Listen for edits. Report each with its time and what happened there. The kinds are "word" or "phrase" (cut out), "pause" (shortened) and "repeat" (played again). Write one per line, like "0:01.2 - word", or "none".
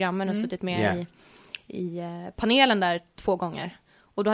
none